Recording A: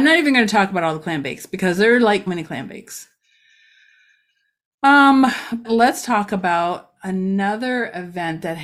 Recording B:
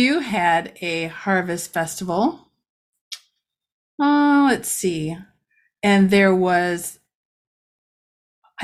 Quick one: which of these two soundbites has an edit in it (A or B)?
A